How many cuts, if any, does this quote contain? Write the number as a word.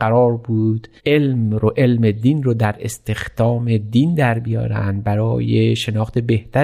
one